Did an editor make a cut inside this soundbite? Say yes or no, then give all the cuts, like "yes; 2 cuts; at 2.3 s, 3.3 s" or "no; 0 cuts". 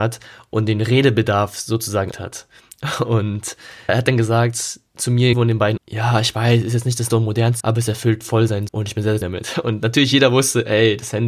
yes; 8 cuts; at 2.1 s, 3.9 s, 5.3 s, 5.8 s, 7.1 s, 7.6 s, 8.7 s, 9.2 s